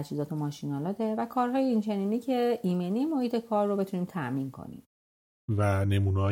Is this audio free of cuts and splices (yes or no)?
yes